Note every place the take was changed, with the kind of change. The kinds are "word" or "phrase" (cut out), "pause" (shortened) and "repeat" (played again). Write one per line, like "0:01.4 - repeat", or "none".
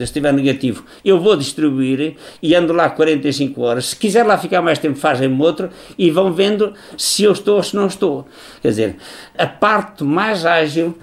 none